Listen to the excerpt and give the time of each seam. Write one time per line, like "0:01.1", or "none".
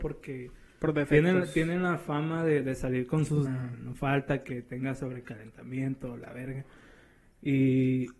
0:03.5